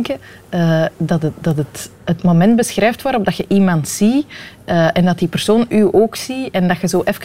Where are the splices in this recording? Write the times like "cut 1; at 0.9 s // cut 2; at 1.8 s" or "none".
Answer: cut 1; at 0.9 s // cut 2; at 2.0 s